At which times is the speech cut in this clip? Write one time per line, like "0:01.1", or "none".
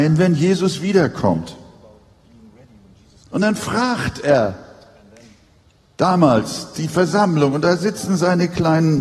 none